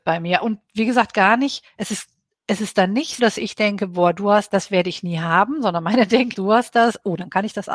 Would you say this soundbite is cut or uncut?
cut